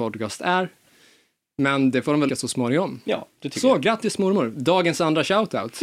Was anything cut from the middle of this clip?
yes; 1 cut; at 2.3 s

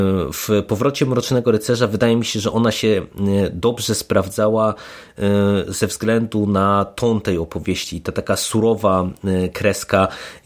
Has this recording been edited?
no; 0 cuts

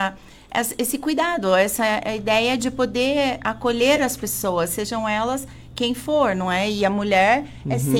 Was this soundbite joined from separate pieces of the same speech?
no; 0 cuts

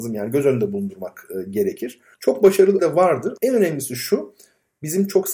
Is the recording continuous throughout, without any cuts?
no; 3 cuts; at 2.1 s, 2.8 s, 3.4 s

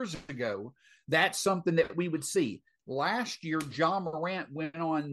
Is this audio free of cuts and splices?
yes; 0 cuts

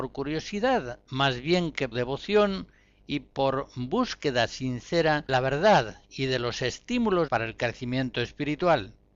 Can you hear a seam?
yes; 3 cuts; at 1.9 s, 5.3 s, 7.3 s

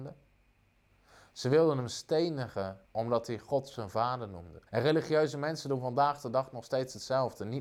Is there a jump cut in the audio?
yes; 2 cuts; at 2.8 s, 4.7 s

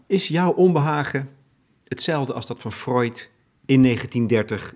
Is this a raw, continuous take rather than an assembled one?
yes; 0 cuts

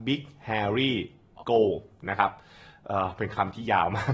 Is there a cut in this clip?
yes; 1 cut; at 1.4 s

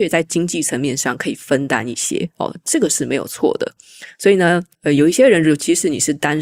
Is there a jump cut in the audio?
yes; 1 cut; at 4.7 s

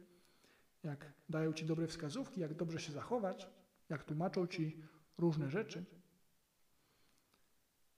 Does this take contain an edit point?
no; 0 cuts

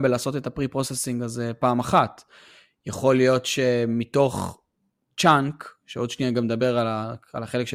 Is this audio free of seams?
yes; 0 cuts

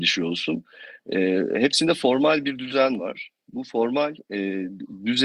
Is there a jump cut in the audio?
no; 0 cuts

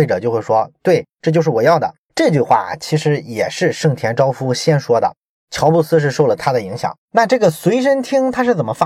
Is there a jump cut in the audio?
yes; 2 cuts; at 2.1 s, 7.0 s

